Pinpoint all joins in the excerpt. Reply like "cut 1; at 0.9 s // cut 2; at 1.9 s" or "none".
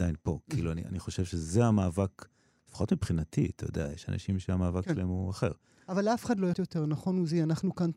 cut 1; at 6.5 s